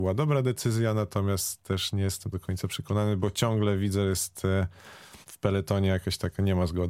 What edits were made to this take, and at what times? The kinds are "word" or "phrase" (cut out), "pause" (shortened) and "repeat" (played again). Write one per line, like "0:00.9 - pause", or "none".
0:02.3 - word
0:05.2 - pause